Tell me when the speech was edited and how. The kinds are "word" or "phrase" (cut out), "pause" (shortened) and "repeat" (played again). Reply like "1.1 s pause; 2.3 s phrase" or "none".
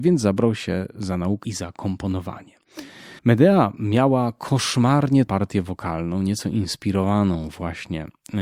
1.4 s phrase; 3.2 s pause; 5.3 s word